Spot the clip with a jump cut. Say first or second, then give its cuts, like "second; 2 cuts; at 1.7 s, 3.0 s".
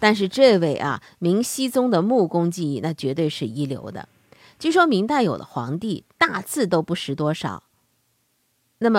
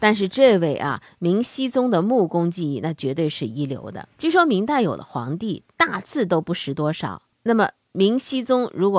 second; 2 cuts; at 4.1 s, 7.3 s